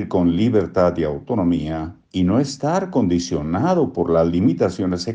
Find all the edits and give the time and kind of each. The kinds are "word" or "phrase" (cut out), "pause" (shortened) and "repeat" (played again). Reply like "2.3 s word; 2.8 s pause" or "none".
2.0 s pause